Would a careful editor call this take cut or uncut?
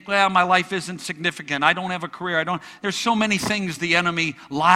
uncut